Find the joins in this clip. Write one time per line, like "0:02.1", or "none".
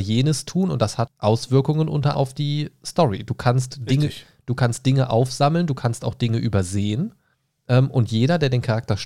0:01.1
0:02.1
0:07.3